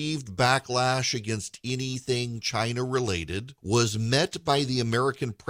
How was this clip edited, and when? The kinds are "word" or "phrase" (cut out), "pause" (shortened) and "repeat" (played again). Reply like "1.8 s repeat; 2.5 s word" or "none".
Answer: 3.6 s pause